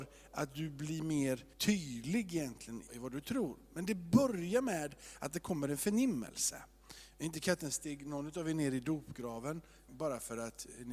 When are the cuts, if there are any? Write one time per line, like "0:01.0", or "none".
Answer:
0:01.5
0:02.9
0:09.9